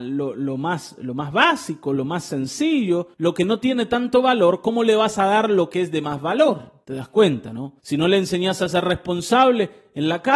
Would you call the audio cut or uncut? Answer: cut